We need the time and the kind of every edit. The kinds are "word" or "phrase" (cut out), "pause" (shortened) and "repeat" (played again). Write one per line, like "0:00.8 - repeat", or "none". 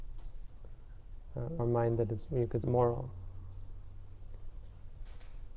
0:01.6 - word
0:02.3 - word
0:02.6 - phrase

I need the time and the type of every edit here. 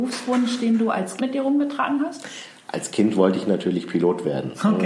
0:01.2 - word

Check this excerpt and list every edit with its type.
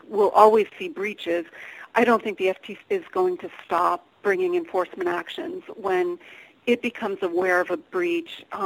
0:02.8 - word

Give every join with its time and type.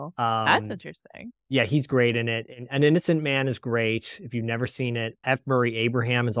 0:02.5 - word
0:05.2 - word

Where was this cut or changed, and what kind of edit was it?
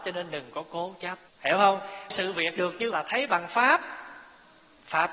0:01.3 - pause
0:02.1 - word
0:02.6 - word
0:02.9 - phrase

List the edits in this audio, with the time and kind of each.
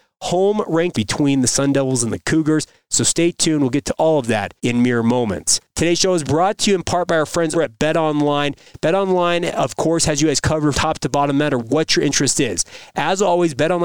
0:00.9 - word
0:04.6 - pause
0:07.5 - word
0:10.7 - word

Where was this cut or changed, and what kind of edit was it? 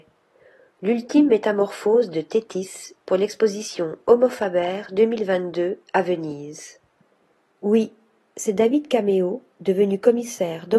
none

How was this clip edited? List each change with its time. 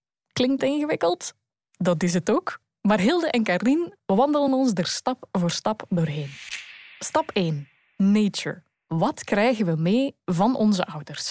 none

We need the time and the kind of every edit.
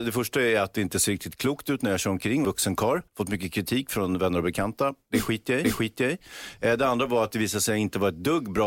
0:02.4 - phrase
0:03.1 - pause
0:05.6 - repeat

